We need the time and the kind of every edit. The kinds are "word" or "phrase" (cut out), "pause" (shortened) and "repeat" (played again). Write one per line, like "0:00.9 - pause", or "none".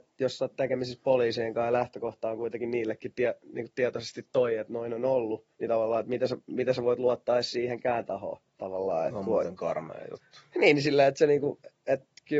0:05.5 - pause
0:08.5 - pause